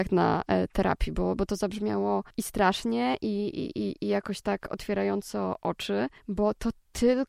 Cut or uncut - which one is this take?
cut